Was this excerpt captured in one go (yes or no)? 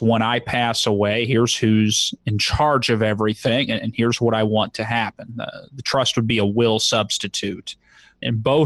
yes